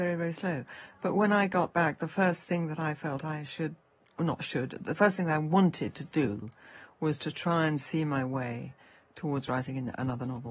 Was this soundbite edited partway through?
no; 0 cuts

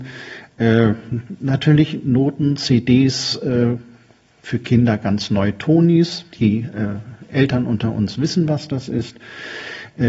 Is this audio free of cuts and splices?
yes; 0 cuts

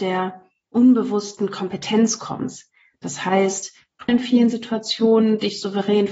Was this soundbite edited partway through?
yes; 1 cut; at 4.1 s

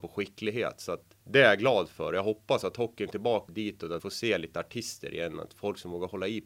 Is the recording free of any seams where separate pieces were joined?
no; 4 cuts; at 1.2 s, 3.1 s, 3.5 s, 4.0 s

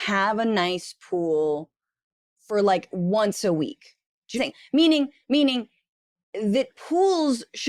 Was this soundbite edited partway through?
yes; 1 cut; at 4.4 s

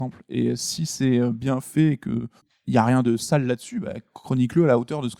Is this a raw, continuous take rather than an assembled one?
no; 1 cut; at 2.4 s

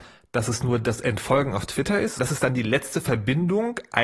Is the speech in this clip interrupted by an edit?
yes; 1 cut; at 2.2 s

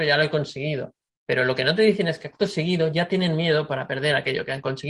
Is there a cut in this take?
yes; 1 cut; at 1.1 s

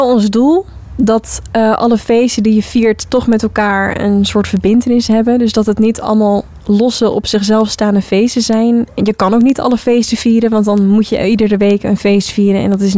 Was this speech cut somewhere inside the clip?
no; 0 cuts

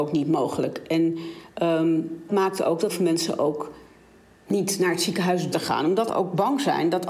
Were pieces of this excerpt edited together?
yes; 4 cuts; at 2.3 s, 2.9 s, 5.5 s, 6.1 s

